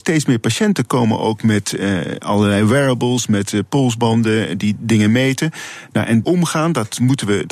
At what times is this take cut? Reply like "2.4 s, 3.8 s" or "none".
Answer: 6.2 s